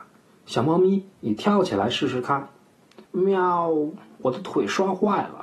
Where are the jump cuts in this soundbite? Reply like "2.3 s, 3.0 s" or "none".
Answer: 3.1 s

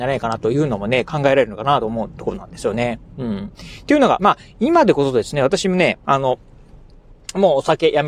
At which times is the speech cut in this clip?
4.2 s

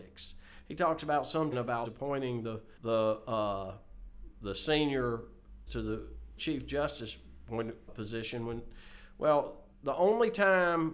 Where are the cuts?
1.5 s, 1.8 s, 2.8 s, 5.7 s, 6.4 s, 7.9 s, 9.7 s

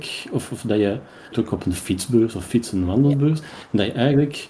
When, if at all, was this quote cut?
1.3 s

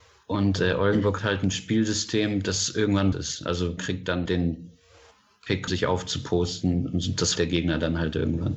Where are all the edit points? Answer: 1.2 s, 3.1 s, 3.8 s, 4.3 s, 5.7 s, 7.4 s

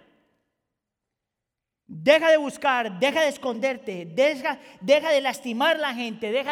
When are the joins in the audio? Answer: none

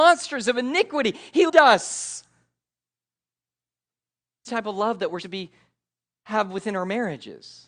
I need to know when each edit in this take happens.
1.5 s, 4.5 s, 5.2 s

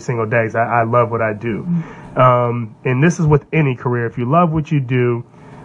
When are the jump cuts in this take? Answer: none

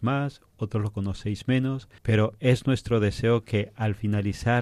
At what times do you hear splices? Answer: 2.0 s

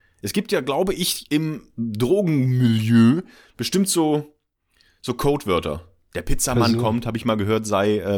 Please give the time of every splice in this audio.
none

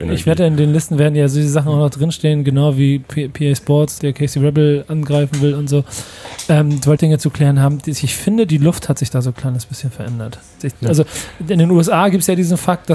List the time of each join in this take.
4.0 s, 7.0 s

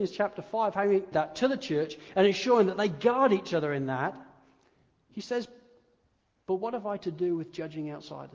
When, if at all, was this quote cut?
1.1 s

